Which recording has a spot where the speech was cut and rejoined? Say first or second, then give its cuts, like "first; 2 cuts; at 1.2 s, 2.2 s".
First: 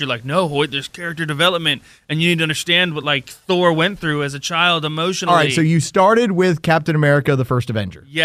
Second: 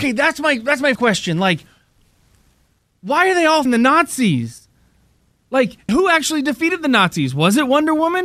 second; 3 cuts; at 1.0 s, 3.7 s, 5.9 s